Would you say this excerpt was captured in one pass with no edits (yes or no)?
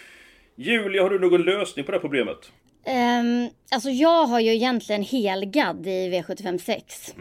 yes